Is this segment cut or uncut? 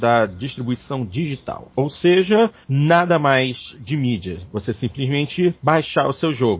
uncut